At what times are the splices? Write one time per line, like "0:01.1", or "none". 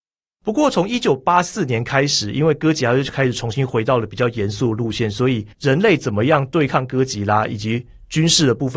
0:05.5